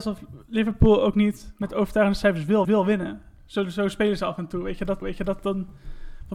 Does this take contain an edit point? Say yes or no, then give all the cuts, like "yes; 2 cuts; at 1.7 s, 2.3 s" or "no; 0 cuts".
yes; 2 cuts; at 2.6 s, 5.0 s